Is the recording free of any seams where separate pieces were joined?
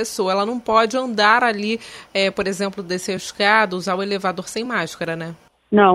yes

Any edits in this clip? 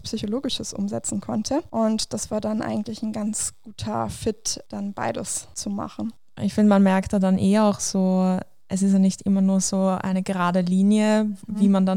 no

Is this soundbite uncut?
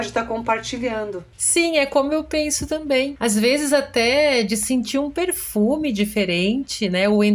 yes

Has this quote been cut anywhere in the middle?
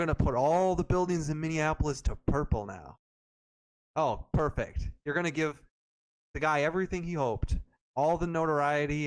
no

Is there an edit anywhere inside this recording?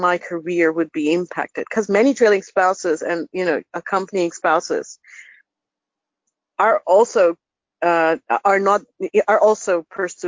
no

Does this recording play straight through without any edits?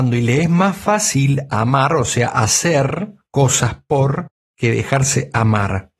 yes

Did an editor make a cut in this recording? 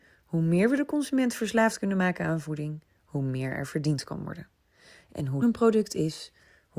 yes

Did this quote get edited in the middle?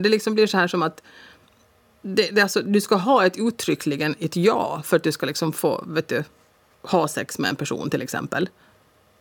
no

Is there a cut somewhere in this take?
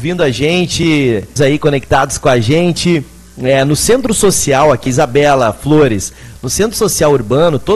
yes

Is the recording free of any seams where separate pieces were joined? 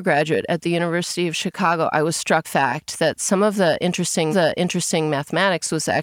no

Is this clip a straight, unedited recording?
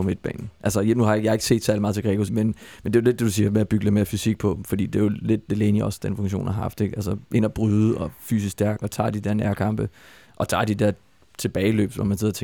no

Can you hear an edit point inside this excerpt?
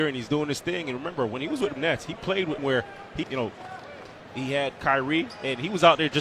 yes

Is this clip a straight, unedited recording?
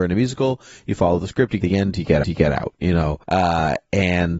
no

